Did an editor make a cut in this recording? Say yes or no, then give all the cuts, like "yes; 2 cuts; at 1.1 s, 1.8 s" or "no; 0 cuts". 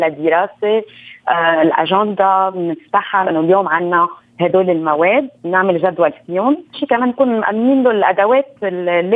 yes; 3 cuts; at 3.2 s, 5.3 s, 6.7 s